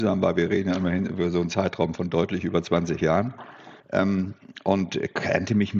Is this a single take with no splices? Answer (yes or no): no